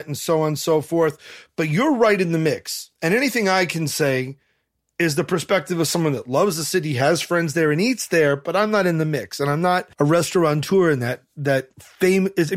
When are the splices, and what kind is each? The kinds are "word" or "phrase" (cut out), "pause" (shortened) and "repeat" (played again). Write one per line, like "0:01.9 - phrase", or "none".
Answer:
0:03.0 - pause
0:09.9 - pause